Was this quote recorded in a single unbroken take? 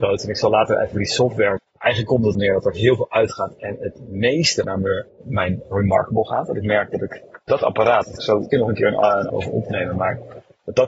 no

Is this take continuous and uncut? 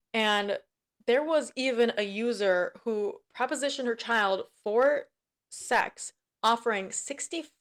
yes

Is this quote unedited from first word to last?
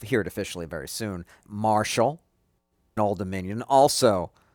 no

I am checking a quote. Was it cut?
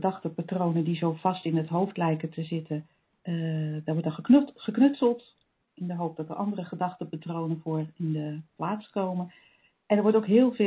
no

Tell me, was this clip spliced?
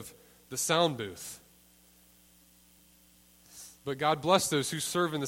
yes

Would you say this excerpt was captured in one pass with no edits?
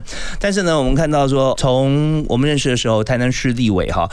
no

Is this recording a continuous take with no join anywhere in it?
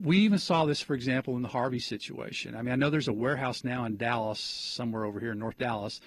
yes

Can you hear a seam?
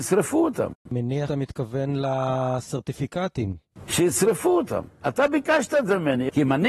yes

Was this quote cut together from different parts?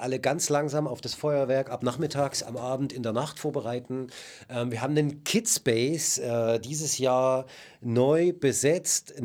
no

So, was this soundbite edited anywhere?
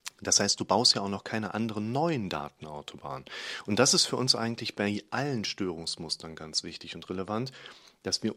no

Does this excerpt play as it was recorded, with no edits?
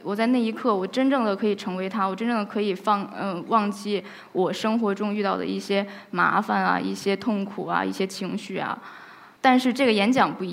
yes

